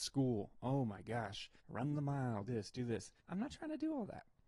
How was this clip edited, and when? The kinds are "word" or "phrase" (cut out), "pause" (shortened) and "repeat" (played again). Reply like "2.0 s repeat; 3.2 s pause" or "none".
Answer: 1.6 s pause; 2.5 s word; 3.2 s pause